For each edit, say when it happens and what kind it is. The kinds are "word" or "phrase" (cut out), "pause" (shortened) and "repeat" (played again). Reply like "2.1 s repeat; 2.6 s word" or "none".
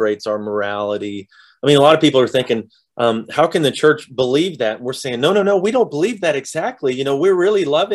none

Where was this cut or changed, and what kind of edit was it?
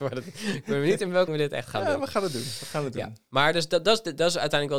1.3 s word

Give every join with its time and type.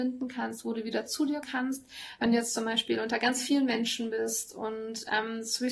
1.4 s word

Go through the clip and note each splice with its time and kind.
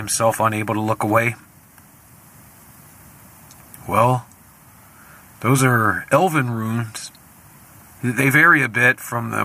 none

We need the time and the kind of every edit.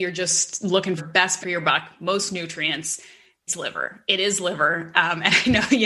1.0 s word; 1.4 s word; 3.5 s word

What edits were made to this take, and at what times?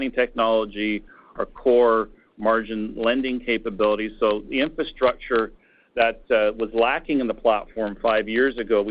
none

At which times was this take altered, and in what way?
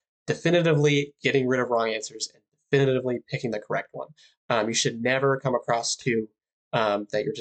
none

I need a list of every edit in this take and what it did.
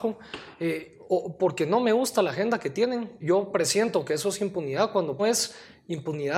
3.2 s word; 5.2 s phrase

